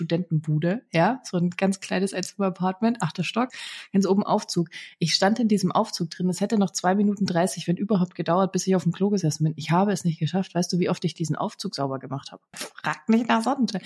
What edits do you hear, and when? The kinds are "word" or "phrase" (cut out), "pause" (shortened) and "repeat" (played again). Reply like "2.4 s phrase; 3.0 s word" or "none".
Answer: none

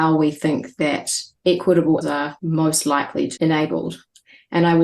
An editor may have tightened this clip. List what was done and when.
2.0 s word; 3.4 s word

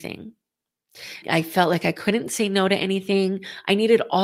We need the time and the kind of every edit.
1.2 s word

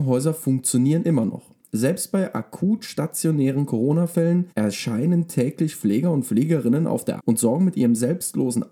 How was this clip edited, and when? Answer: 4.5 s pause; 7.2 s word

